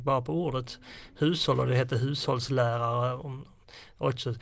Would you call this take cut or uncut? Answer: uncut